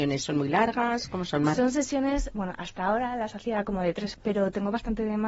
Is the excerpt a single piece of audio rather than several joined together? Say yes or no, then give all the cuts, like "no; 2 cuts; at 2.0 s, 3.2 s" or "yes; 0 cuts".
no; 1 cut; at 4.1 s